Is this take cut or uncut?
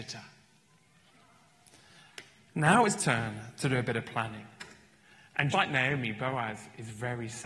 cut